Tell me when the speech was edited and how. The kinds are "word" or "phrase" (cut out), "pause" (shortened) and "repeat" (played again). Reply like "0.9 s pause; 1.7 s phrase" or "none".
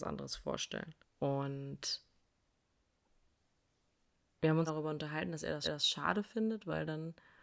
1.0 s pause; 4.7 s word; 5.6 s repeat